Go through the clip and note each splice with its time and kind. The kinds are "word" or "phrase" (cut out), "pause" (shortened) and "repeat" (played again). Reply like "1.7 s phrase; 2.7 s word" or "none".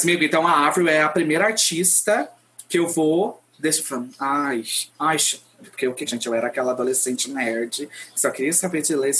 3.5 s pause; 4.9 s pause; 6.1 s phrase